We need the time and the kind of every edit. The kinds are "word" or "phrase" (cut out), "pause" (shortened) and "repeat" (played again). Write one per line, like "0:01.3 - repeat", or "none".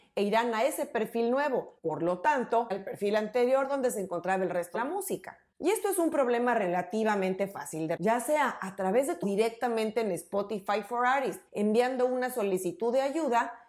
0:01.8 - pause
0:02.7 - phrase
0:04.7 - word
0:05.5 - pause
0:08.0 - word
0:09.2 - phrase
0:11.5 - pause